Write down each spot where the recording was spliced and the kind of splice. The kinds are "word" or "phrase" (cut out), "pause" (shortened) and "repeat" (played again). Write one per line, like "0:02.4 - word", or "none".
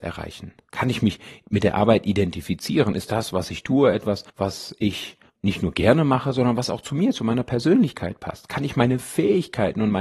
0:04.3 - pause
0:05.3 - pause